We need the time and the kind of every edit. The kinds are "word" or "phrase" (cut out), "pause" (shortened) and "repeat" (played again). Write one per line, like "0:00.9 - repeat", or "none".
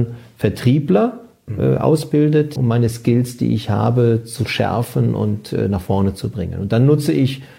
0:02.6 - word